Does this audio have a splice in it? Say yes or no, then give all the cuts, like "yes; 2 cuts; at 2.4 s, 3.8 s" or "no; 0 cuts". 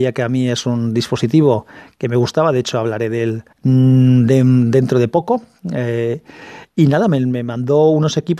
yes; 1 cut; at 3.5 s